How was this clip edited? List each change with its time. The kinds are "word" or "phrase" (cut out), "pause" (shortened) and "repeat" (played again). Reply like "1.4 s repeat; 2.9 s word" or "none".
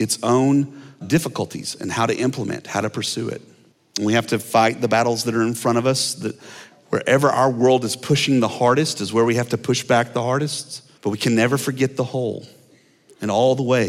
1.0 s word; 3.7 s pause; 11.0 s pause